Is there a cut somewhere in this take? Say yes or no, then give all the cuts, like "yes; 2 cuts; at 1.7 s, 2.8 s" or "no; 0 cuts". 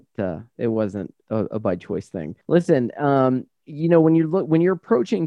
yes; 1 cut; at 2.4 s